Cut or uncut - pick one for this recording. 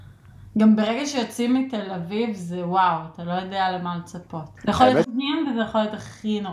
cut